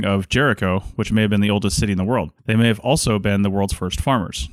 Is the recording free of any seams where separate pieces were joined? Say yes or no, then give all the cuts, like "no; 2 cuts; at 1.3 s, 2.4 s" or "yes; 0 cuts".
no; 1 cut; at 2.4 s